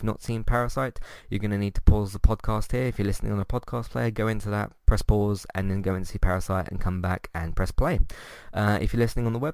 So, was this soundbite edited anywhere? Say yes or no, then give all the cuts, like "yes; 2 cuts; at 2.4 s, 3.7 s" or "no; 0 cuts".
yes; 1 cut; at 4.8 s